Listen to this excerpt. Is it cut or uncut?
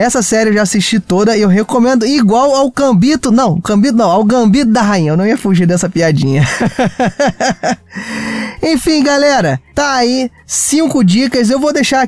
uncut